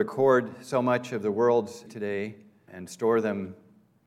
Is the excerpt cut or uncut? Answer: cut